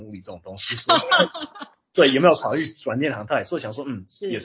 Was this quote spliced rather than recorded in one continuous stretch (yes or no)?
no